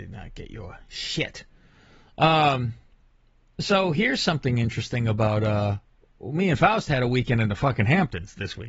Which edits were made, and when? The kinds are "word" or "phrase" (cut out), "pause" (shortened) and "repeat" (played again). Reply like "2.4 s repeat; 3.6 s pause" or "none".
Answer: none